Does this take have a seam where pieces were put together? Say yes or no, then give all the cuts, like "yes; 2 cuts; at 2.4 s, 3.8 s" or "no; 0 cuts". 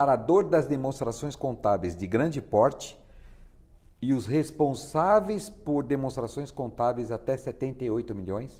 no; 0 cuts